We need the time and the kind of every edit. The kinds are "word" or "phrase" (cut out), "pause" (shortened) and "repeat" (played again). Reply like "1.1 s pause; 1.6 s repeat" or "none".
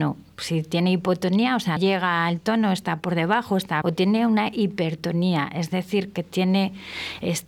1.8 s word; 3.8 s word